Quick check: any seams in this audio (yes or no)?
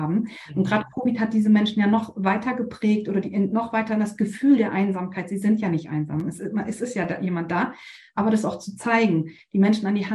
no